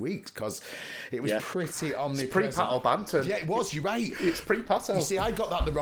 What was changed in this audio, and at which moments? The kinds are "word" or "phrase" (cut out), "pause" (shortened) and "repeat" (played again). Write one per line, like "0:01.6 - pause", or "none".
none